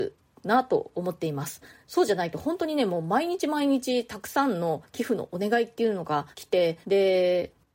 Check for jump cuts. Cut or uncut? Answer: cut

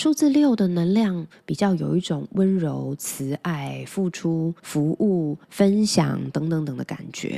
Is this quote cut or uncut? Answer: cut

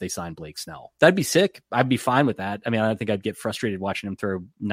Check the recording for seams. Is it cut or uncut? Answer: uncut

